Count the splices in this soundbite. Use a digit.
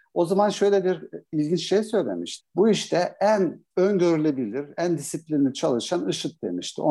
1